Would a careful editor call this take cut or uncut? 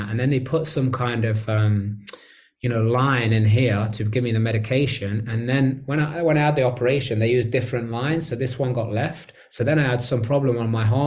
uncut